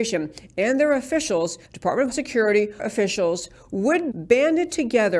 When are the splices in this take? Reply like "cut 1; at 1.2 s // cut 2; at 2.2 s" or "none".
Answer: cut 1; at 1.6 s // cut 2; at 2.1 s // cut 3; at 2.8 s // cut 4; at 4.1 s